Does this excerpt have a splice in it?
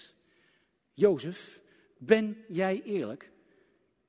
no; 0 cuts

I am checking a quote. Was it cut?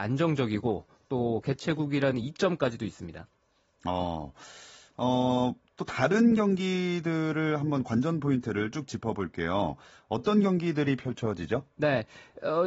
no; 0 cuts

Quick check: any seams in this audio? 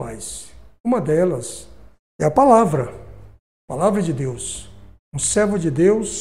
yes; 2 cuts; at 2.0 s, 5.0 s

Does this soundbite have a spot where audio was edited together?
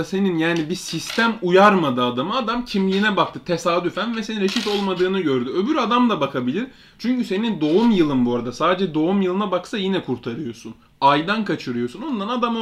no; 0 cuts

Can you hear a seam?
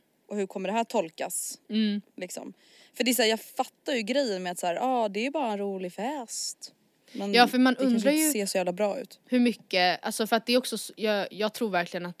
no; 0 cuts

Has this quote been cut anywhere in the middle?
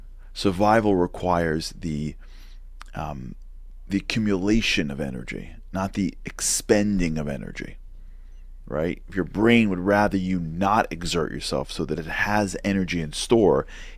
no; 0 cuts

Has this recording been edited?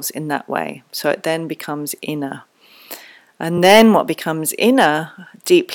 no; 0 cuts

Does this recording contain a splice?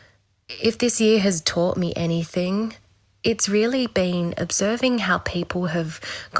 no; 0 cuts

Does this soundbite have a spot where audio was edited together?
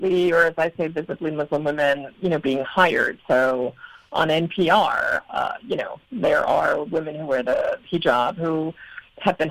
no; 0 cuts

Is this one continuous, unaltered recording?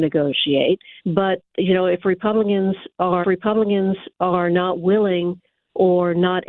no; 2 cuts; at 1.0 s, 3.2 s

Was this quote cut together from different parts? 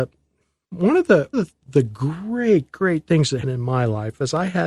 yes; 2 cuts; at 1.3 s, 3.4 s

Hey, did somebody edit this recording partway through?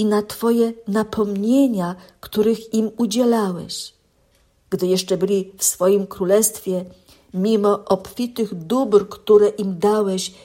no; 0 cuts

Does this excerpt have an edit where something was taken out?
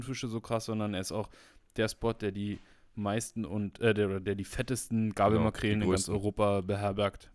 no; 0 cuts

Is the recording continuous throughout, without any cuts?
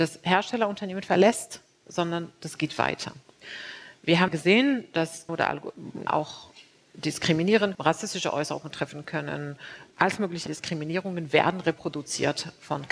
no; 6 cuts; at 4.0 s, 4.3 s, 5.3 s, 6.1 s, 7.7 s, 10.5 s

